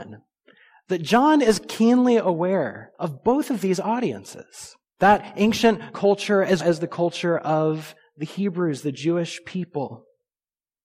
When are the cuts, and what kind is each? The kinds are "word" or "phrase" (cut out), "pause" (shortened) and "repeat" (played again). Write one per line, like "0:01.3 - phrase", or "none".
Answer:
0:02.9 - pause
0:04.8 - pause
0:05.9 - word
0:06.6 - word